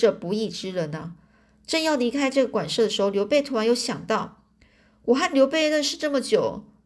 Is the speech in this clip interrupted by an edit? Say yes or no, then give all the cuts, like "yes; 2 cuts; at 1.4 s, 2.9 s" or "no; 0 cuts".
no; 0 cuts